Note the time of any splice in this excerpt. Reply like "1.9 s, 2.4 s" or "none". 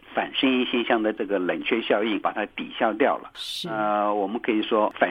none

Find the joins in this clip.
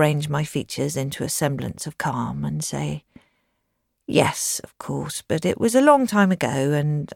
none

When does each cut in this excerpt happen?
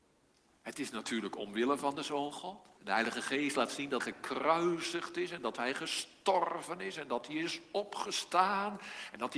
2.3 s, 2.8 s, 4.0 s

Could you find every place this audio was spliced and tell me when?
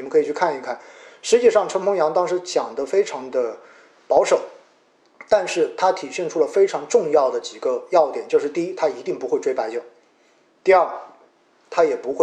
none

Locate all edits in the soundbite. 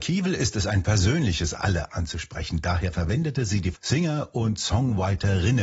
1.5 s, 3.7 s

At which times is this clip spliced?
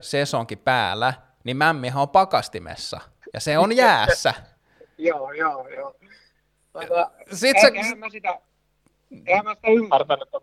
none

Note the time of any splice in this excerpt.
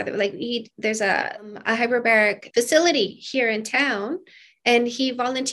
2.5 s

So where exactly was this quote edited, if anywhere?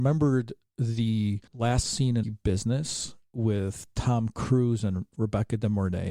1.5 s, 2.2 s

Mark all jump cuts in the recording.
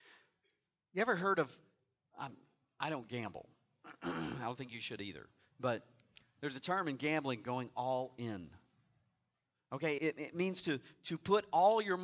10.0 s

